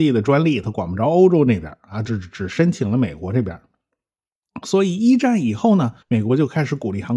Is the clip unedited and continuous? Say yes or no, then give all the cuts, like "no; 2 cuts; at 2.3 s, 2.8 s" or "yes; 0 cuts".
no; 1 cut; at 6.0 s